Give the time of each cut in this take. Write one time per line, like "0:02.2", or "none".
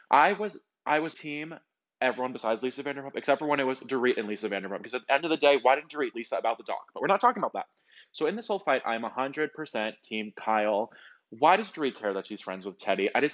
0:01.1
0:06.1